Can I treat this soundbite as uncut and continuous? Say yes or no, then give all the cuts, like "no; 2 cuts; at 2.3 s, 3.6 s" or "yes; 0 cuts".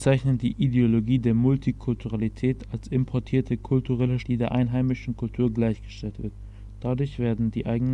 no; 1 cut; at 4.2 s